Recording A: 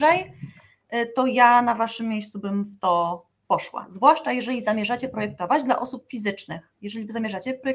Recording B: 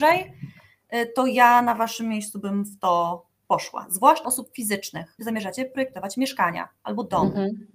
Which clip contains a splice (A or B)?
B